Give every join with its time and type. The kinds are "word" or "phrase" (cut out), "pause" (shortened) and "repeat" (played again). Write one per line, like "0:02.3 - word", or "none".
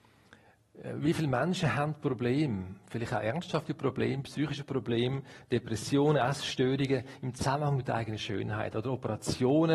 none